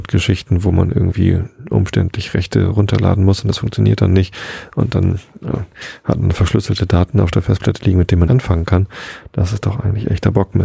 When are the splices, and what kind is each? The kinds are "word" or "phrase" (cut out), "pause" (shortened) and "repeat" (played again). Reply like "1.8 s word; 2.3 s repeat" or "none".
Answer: 8.3 s word